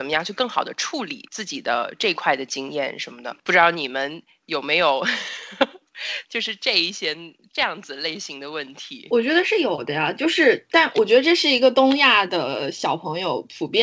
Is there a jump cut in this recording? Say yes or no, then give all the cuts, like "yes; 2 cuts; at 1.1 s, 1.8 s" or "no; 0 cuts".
yes; 1 cut; at 6.2 s